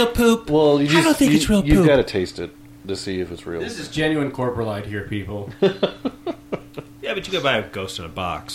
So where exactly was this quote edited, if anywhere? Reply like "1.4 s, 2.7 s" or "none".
none